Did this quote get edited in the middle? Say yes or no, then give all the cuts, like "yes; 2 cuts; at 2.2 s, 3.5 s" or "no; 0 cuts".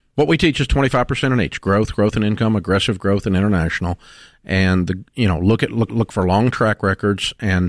yes; 1 cut; at 5.9 s